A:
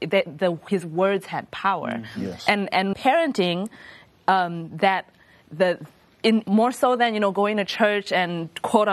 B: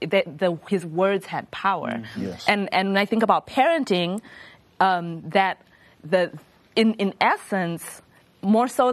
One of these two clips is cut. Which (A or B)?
A